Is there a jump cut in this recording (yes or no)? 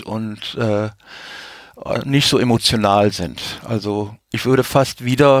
no